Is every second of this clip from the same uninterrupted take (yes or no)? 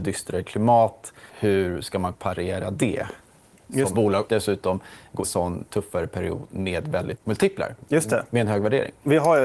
no